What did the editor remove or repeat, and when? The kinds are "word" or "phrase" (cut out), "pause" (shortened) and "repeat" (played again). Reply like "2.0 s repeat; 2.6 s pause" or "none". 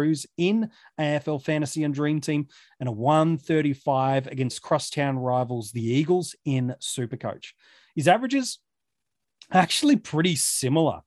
none

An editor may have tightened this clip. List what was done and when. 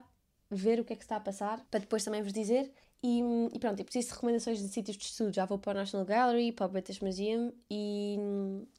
1.7 s pause; 2.8 s pause

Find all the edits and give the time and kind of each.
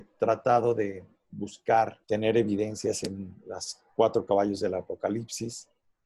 2.0 s pause

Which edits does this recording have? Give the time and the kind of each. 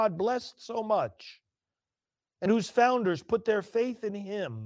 none

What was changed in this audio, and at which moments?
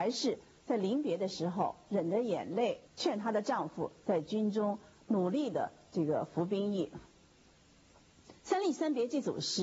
2.9 s pause; 5.0 s pause; 8.4 s pause

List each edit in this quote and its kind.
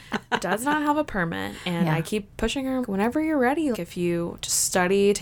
2.8 s word; 3.7 s word

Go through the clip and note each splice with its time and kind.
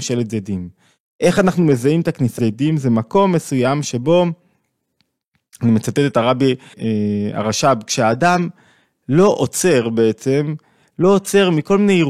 2.4 s word; 6.7 s word

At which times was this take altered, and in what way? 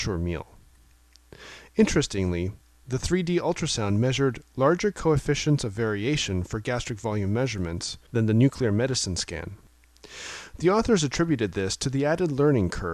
none

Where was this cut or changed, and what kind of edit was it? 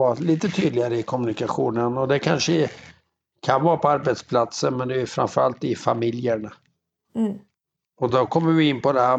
none

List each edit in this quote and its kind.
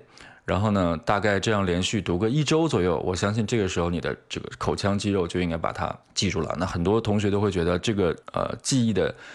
6.0 s pause; 8.2 s pause

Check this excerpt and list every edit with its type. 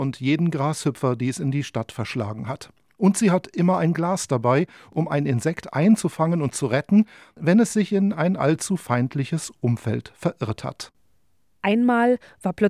none

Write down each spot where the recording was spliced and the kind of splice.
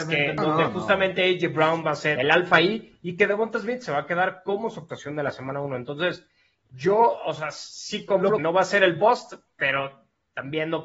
2.2 s word; 8.4 s word

